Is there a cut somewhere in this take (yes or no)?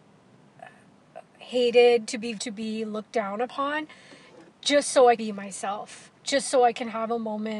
yes